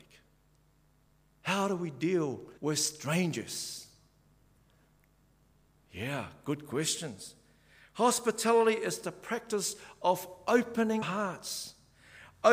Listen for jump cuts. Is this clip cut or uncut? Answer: cut